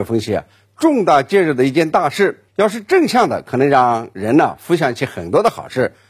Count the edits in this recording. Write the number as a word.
one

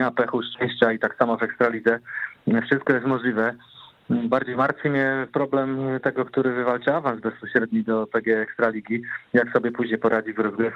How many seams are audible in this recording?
zero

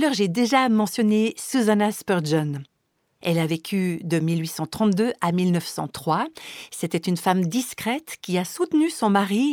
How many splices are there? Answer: zero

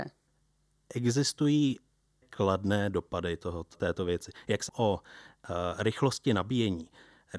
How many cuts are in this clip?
three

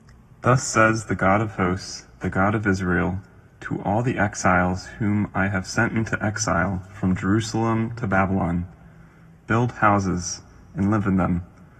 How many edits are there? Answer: zero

